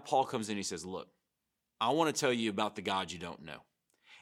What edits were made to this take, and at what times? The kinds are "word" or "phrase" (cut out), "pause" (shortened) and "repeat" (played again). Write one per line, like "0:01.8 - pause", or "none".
0:01.3 - pause